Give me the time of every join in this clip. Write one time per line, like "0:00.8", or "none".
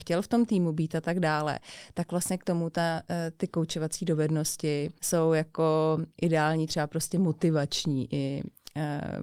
0:05.0
0:06.1

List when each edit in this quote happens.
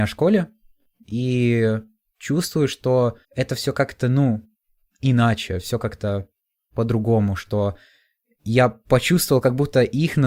0:03.2

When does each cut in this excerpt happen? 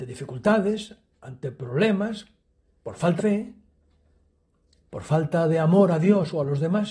0:03.2

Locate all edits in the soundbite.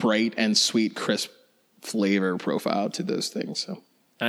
none

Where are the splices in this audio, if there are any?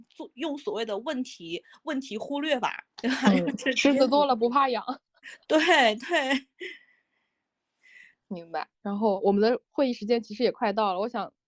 0:02.9
0:08.7

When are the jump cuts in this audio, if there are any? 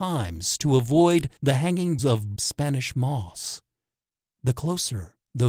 0:01.4
0:02.0
0:02.4

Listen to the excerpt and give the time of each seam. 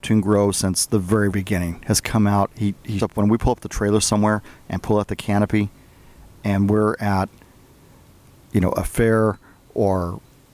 0:01.3
0:03.0

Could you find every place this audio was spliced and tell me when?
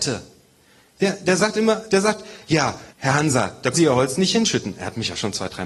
0:02.9
0:03.7

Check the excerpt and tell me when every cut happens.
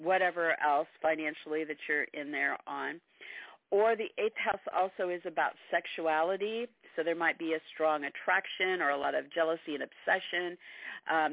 none

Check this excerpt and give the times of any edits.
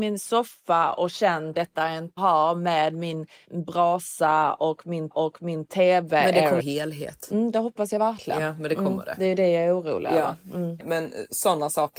0:01.5
0:02.2
0:05.1
0:06.6

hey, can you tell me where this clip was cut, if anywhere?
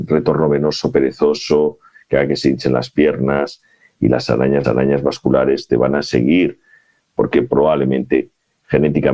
0:04.6

